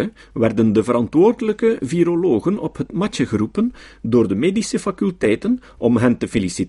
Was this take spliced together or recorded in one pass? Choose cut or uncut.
uncut